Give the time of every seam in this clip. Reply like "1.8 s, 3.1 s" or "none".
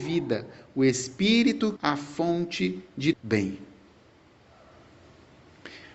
1.8 s, 3.1 s